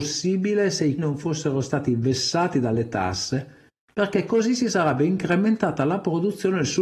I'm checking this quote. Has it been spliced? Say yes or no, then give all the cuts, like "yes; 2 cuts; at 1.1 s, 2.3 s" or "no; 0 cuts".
yes; 1 cut; at 1.0 s